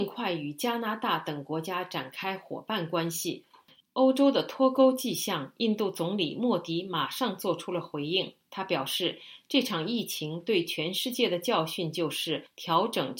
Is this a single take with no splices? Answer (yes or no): yes